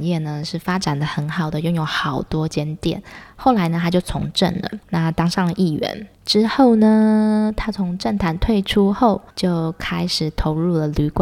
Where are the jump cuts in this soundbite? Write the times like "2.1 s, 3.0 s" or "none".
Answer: 4.8 s, 6.1 s, 9.3 s